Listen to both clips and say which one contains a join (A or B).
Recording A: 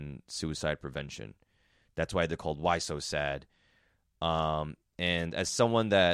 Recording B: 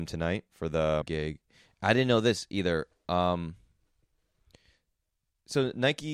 B